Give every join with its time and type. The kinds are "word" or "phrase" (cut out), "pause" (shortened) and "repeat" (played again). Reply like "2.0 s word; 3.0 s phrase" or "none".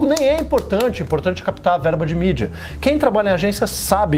none